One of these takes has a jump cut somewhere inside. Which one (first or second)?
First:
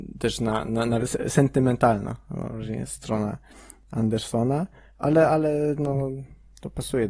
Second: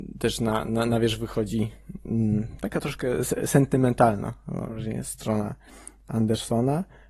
first